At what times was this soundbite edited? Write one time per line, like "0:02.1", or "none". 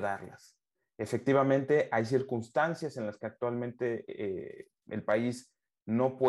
none